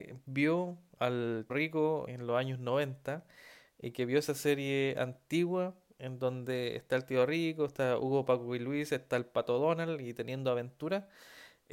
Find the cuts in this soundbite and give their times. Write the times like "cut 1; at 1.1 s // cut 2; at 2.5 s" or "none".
cut 1; at 1.5 s // cut 2; at 2.1 s